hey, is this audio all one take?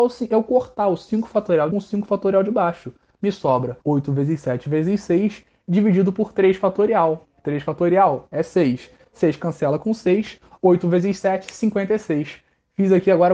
no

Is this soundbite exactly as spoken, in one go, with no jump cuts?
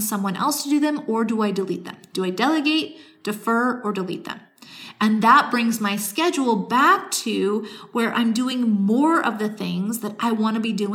yes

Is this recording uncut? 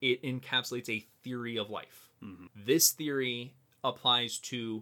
yes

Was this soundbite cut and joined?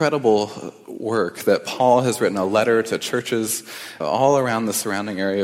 yes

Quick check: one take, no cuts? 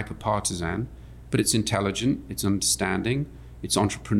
yes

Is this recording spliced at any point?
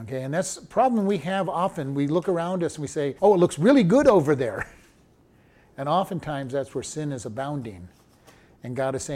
yes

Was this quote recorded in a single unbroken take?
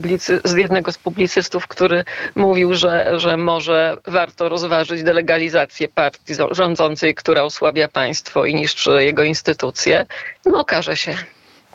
no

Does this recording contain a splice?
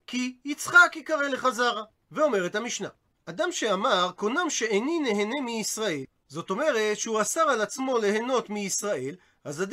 no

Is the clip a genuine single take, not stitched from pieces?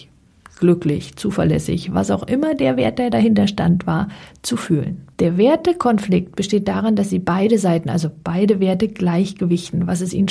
no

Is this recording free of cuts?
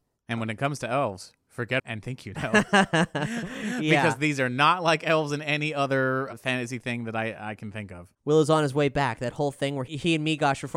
no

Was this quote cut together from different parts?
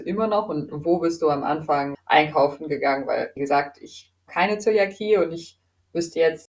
yes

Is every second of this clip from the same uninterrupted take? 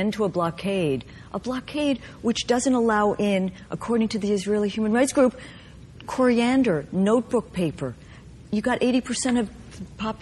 yes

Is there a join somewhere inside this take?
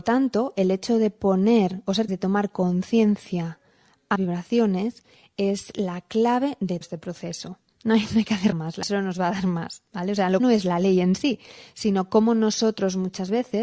yes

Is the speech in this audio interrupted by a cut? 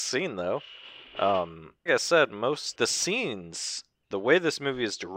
yes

